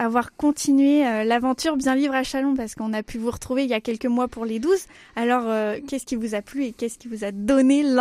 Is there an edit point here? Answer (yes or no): no